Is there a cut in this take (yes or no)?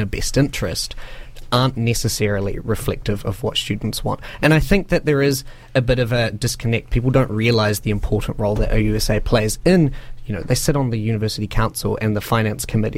no